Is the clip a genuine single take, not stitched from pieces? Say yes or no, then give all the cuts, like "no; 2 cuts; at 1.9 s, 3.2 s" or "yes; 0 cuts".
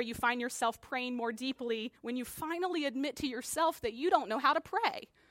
no; 1 cut; at 2.0 s